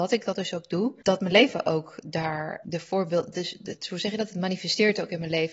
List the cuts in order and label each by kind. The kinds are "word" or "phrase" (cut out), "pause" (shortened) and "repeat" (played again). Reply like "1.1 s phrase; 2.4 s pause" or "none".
none